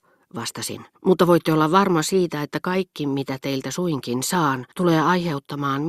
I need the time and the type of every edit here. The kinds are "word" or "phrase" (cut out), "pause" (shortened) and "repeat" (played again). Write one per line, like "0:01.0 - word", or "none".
0:00.9 - pause
0:04.7 - pause